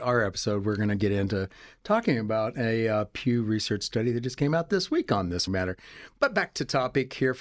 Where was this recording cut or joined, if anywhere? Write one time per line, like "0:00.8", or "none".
0:05.5